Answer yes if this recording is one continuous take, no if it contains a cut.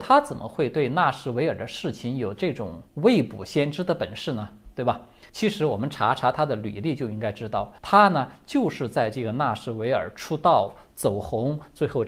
no